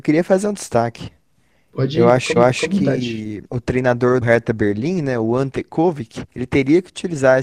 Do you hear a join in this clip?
yes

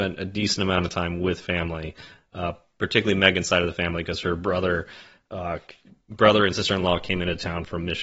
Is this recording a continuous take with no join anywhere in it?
yes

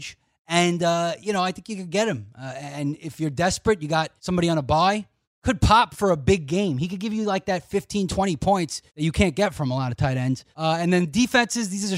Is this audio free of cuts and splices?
no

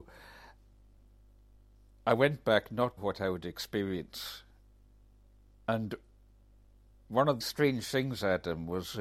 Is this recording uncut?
no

